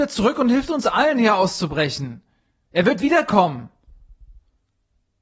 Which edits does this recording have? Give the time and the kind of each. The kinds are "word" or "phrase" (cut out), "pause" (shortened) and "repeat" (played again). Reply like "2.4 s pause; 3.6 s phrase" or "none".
none